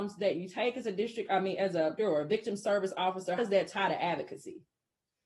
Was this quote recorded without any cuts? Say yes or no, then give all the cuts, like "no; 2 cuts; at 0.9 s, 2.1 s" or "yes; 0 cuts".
no; 2 cuts; at 2.0 s, 3.4 s